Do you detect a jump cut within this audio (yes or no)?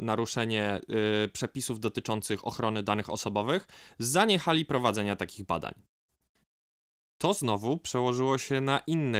no